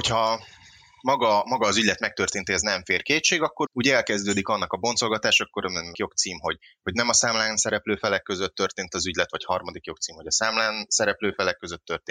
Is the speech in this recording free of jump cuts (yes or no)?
no